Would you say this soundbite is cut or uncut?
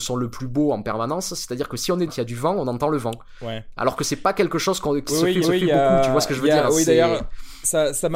cut